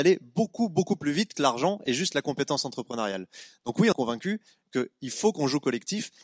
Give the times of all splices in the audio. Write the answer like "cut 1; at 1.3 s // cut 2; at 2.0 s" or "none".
cut 1; at 1.3 s // cut 2; at 3.9 s